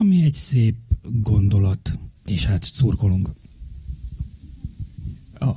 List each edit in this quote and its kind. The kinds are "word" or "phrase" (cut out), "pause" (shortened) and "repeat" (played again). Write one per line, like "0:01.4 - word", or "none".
0:02.2 - pause